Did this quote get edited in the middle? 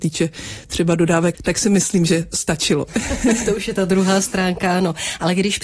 yes; 1 cut; at 1.3 s

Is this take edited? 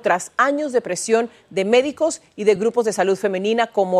no; 0 cuts

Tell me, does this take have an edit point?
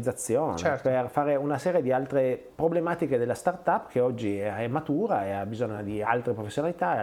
no; 0 cuts

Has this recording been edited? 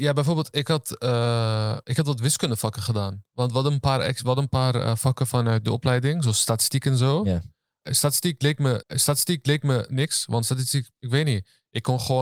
yes; 1 cut; at 8.8 s

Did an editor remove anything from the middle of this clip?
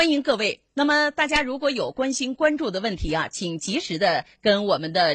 no; 0 cuts

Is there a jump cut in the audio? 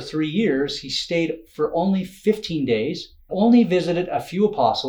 yes; 1 cut; at 3.3 s

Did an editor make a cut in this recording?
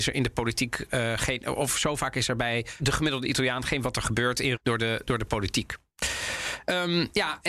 yes; 3 cuts; at 2.8 s, 3.8 s, 4.5 s

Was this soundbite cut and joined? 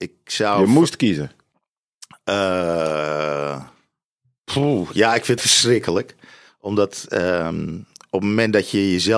yes; 1 cut; at 5.4 s

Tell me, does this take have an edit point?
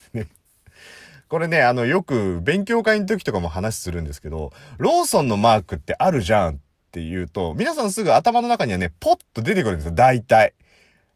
no; 0 cuts

